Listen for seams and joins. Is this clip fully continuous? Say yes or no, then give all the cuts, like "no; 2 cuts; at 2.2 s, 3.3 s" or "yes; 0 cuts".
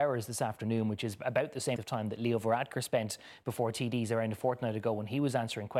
no; 1 cut; at 1.8 s